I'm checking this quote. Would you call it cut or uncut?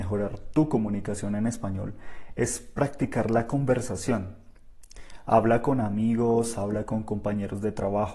uncut